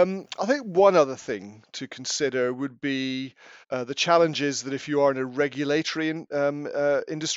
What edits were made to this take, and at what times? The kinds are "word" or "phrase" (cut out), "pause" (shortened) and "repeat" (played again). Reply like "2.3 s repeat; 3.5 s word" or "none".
3.6 s pause